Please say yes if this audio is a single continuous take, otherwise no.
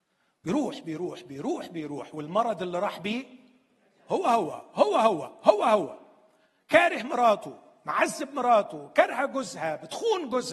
yes